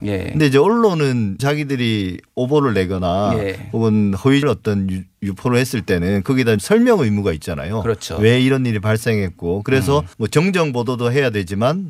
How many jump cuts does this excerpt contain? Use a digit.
4